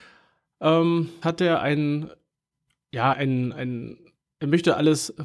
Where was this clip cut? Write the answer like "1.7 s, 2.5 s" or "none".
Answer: 1.2 s, 3.1 s